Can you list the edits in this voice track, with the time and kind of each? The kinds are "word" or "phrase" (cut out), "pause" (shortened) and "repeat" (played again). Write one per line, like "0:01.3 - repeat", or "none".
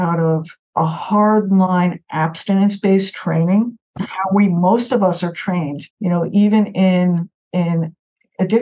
0:05.9 - pause